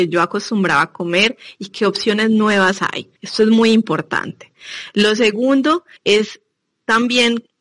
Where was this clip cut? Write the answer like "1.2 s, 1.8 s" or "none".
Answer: 3.2 s, 6.0 s